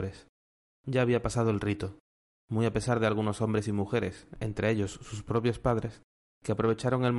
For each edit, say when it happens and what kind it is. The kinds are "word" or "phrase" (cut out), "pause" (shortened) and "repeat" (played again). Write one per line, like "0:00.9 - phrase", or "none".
none